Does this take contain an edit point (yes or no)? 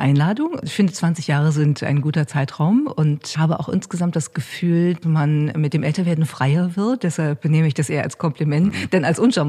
yes